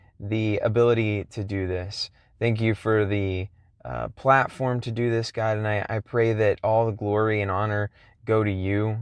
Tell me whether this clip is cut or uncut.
uncut